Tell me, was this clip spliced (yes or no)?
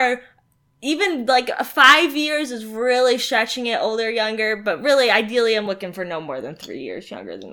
no